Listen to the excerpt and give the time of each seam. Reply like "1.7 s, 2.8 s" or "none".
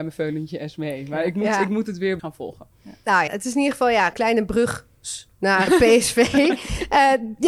2.2 s, 3.3 s, 4.1 s, 5.7 s